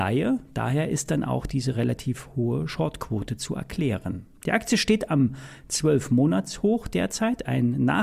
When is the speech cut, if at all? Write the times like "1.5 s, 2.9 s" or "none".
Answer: none